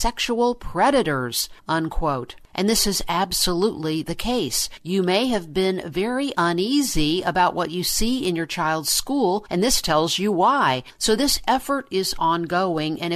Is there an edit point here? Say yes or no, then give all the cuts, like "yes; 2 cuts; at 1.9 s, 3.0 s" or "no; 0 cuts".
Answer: no; 0 cuts